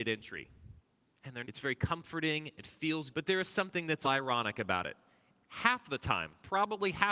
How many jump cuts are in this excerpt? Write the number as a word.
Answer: three